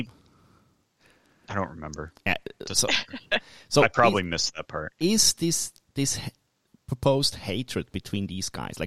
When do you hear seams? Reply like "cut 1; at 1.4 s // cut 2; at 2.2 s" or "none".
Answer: none